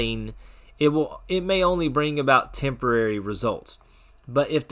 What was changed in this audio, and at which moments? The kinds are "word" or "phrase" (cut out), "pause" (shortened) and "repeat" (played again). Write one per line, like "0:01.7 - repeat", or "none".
none